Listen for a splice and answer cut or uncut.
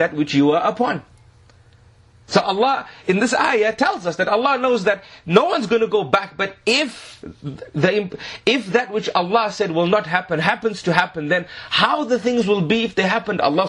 uncut